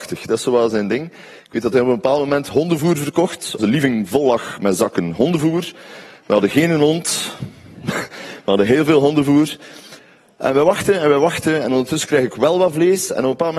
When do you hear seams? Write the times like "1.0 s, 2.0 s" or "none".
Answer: 3.6 s